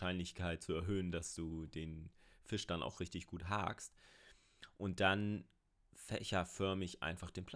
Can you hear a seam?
no; 0 cuts

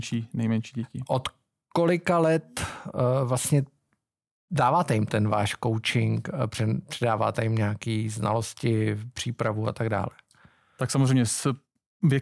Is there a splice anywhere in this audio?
no; 0 cuts

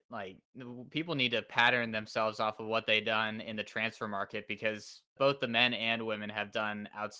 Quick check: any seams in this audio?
yes; 1 cut; at 5.2 s

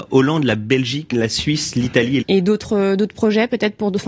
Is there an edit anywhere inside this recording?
yes; 2 cuts; at 1.1 s, 2.2 s

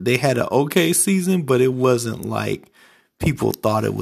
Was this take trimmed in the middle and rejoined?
no; 0 cuts

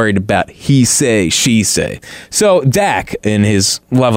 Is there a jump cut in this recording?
no; 0 cuts

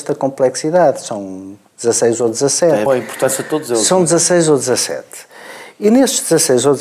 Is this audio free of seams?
no; 1 cut; at 2.9 s

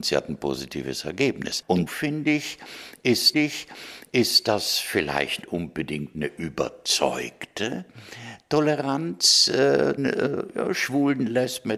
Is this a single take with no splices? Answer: no; 4 cuts; at 1.9 s, 3.3 s, 5.4 s, 10.0 s

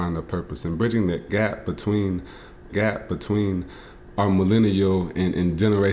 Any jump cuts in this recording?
yes; 1 cut; at 2.7 s

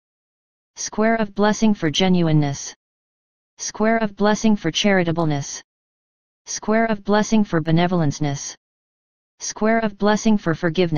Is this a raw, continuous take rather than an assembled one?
yes; 0 cuts

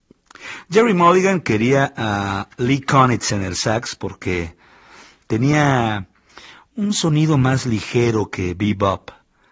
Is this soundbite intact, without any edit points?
yes; 0 cuts

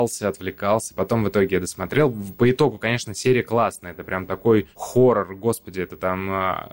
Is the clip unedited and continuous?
no; 1 cut; at 4.7 s

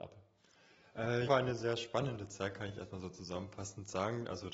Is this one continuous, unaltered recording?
no; 1 cut; at 1.3 s

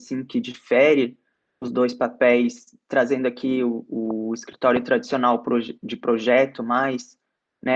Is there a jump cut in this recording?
no; 0 cuts

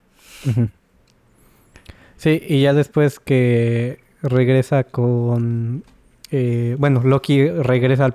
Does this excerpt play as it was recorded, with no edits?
yes; 0 cuts

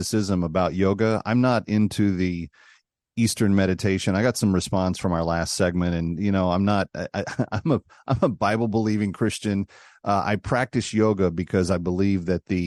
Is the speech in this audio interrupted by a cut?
no; 0 cuts

